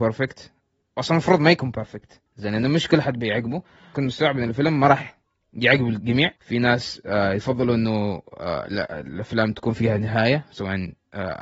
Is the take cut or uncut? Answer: cut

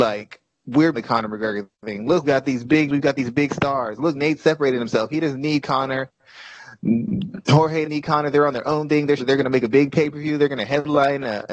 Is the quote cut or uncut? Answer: cut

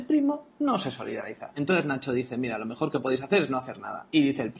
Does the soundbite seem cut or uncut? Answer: uncut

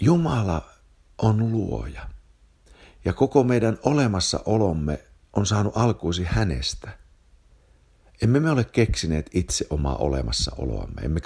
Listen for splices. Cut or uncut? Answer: uncut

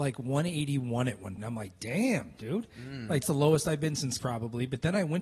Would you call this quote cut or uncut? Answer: cut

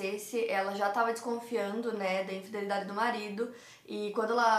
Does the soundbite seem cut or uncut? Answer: uncut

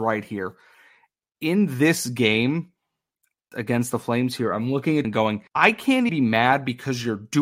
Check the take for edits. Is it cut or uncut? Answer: cut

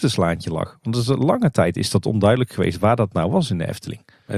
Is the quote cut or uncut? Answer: uncut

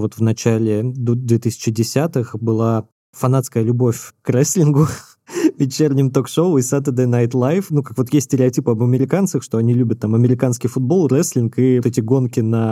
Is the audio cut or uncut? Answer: cut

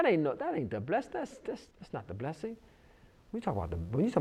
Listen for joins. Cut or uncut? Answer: cut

